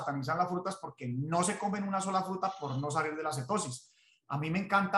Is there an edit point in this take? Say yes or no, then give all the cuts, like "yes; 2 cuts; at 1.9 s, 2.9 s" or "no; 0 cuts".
no; 0 cuts